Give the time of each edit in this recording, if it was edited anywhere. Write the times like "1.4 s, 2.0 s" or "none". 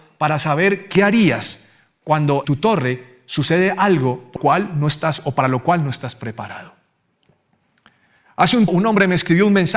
2.4 s, 4.4 s, 8.7 s

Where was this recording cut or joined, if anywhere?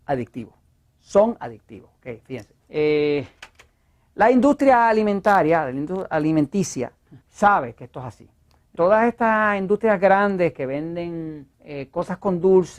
2.6 s, 7.2 s, 8.8 s, 11.5 s

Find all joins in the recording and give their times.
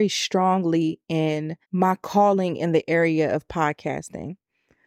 1.6 s

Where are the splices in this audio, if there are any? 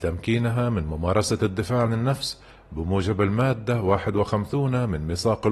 1.9 s

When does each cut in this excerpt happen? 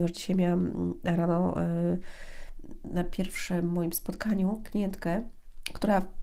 none

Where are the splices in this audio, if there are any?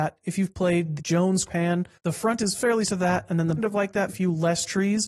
1.0 s, 1.5 s, 1.9 s, 2.8 s, 3.6 s, 4.1 s

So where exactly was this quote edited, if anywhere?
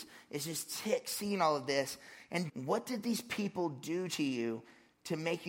2.5 s

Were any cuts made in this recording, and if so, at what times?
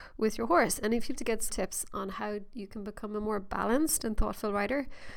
1.1 s, 1.5 s

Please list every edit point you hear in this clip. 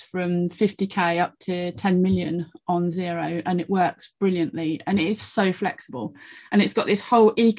none

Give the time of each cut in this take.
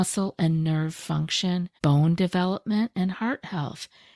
1.8 s

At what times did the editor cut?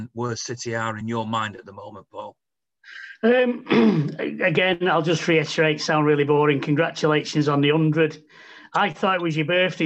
none

